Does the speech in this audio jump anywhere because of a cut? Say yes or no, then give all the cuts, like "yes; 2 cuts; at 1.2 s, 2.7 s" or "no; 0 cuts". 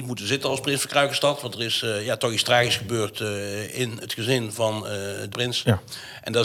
yes; 1 cut; at 5.3 s